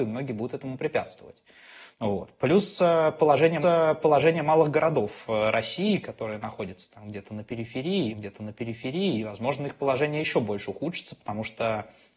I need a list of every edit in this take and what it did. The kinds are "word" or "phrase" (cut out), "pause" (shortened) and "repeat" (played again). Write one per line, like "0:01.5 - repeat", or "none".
0:01.9 - pause
0:03.6 - repeat
0:08.1 - repeat